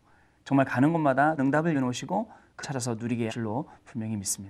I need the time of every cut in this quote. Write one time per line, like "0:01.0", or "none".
0:01.4
0:01.7
0:02.6
0:03.3